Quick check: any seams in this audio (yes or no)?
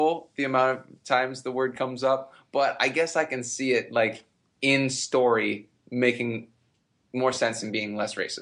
no